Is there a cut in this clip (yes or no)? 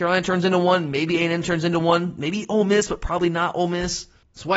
no